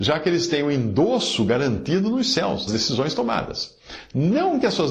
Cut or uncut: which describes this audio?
cut